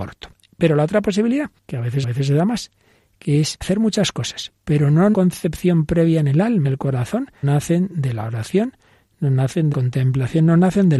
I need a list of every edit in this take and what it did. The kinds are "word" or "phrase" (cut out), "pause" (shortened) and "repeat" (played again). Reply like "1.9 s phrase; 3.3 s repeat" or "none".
1.6 s pause; 2.0 s repeat; 3.6 s word; 5.1 s phrase; 6.6 s word; 7.4 s word; 9.7 s word